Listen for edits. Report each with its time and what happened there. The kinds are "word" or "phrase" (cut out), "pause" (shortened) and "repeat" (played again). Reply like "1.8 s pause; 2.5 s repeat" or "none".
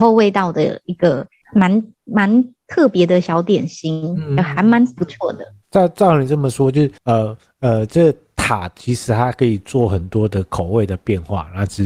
1.4 s pause; 7.0 s pause